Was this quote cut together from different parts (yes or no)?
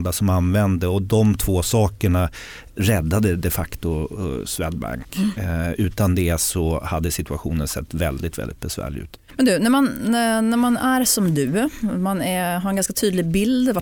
yes